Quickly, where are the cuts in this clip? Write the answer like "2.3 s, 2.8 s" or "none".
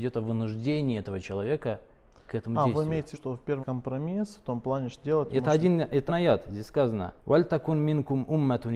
3.1 s, 3.6 s, 5.0 s, 6.1 s, 7.2 s